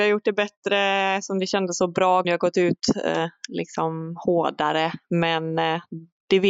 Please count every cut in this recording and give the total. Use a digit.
1